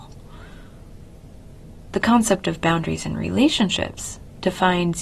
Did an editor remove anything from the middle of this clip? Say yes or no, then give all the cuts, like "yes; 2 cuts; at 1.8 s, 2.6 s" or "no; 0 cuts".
no; 0 cuts